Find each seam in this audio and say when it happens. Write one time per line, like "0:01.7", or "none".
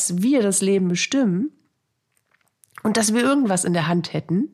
none